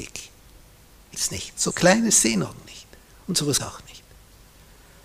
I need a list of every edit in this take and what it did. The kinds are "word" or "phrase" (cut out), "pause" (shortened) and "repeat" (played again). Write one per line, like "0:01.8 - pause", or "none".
0:01.1 - word
0:01.7 - word
0:02.4 - word
0:03.6 - word